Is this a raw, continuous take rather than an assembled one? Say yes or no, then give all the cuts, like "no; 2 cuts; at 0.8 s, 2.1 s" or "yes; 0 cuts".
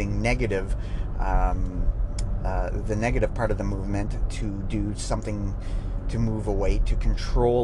yes; 0 cuts